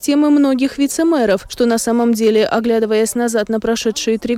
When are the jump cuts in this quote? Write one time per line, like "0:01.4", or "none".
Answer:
none